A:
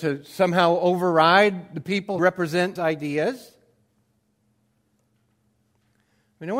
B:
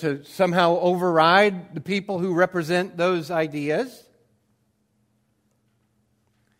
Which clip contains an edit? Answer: A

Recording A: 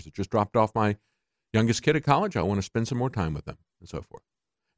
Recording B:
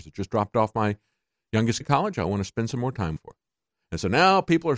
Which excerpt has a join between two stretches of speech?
B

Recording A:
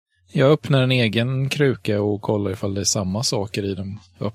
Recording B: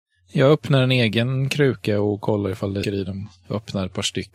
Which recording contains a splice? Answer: B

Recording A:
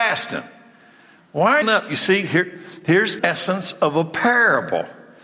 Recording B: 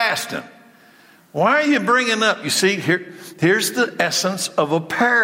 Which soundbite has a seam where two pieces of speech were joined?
A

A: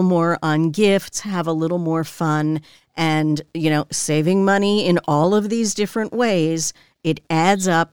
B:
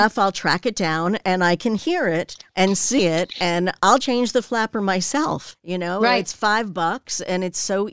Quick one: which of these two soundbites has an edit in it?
B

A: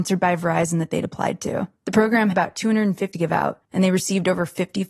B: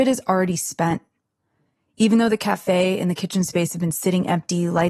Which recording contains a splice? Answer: A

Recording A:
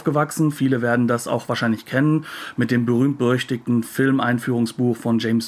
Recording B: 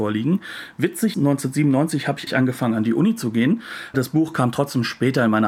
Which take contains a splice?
B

